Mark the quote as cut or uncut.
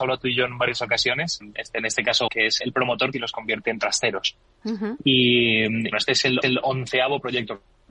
cut